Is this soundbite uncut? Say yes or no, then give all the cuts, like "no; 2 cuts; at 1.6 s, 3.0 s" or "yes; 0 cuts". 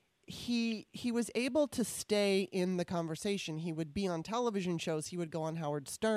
yes; 0 cuts